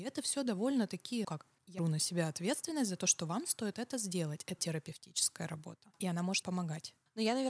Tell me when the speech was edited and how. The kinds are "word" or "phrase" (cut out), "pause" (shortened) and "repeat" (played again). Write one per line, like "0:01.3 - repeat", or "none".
0:01.2 - word
0:01.8 - word
0:03.7 - word
0:04.6 - word
0:06.4 - word